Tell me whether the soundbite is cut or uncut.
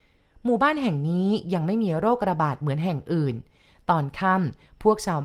uncut